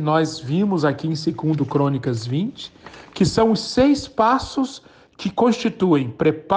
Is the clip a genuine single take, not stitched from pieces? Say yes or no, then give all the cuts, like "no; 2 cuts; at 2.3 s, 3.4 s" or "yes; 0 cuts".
yes; 0 cuts